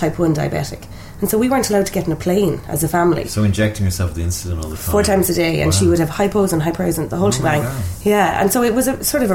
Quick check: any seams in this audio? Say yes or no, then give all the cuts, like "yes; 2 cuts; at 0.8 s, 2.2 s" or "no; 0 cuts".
no; 0 cuts